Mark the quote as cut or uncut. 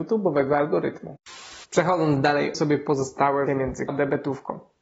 cut